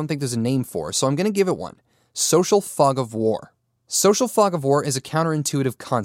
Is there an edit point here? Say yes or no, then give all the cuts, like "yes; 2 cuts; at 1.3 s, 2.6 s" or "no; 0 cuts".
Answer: no; 0 cuts